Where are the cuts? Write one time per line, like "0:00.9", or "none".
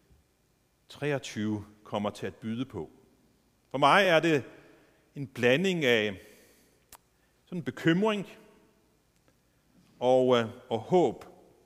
none